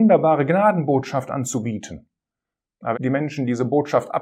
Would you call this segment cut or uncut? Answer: cut